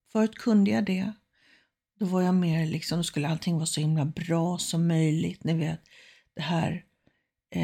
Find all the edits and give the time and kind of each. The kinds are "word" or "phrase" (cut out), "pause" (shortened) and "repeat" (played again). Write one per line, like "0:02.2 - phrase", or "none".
none